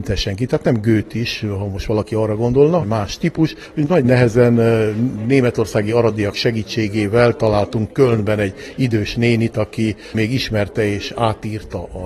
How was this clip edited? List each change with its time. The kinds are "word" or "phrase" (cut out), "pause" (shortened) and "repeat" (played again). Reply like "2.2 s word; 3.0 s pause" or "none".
2.8 s phrase